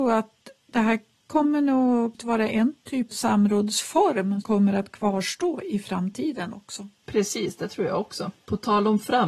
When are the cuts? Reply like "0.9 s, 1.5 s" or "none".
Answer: 2.1 s, 3.1 s, 4.4 s

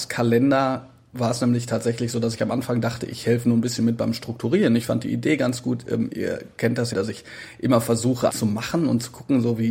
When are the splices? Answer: 1.1 s, 6.9 s, 8.3 s

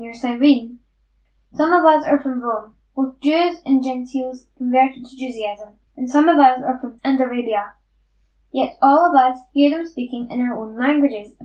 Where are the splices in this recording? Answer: 2.8 s, 5.9 s, 7.0 s

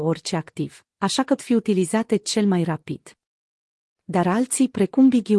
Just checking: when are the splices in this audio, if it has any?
1.4 s

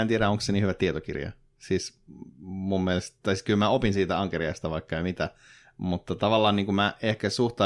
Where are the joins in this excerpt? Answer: none

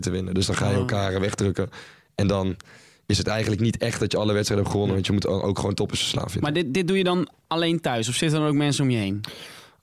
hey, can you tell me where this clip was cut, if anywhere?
none

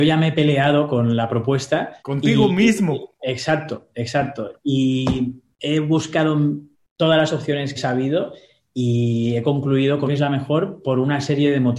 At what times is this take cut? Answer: 2.0 s, 3.1 s, 6.7 s, 7.7 s, 10.1 s

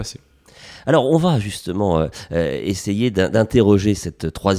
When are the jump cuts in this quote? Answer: none

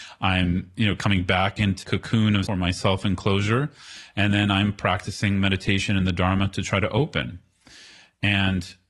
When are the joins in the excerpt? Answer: 1.8 s, 2.5 s

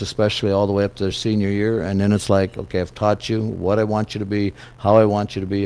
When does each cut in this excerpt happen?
none

